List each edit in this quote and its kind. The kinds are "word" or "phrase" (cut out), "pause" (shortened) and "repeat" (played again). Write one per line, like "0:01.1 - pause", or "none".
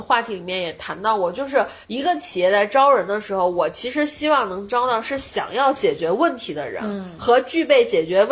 0:01.8 - pause